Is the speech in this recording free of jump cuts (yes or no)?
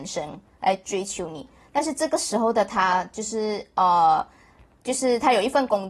yes